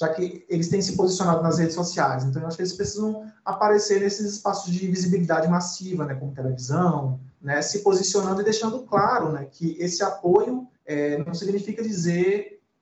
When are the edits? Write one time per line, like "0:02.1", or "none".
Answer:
0:07.3
0:10.7